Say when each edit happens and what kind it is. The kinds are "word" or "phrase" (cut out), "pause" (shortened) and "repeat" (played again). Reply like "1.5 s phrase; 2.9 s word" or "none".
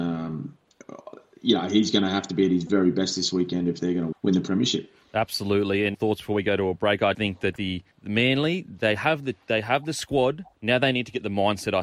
4.1 s word; 5.9 s phrase; 7.1 s word; 7.6 s word; 7.9 s pause; 10.5 s pause